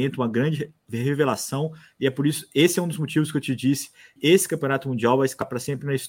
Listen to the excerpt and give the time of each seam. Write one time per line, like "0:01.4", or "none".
0:04.2